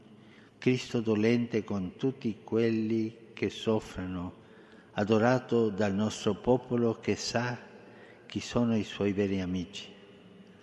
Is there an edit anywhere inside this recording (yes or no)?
no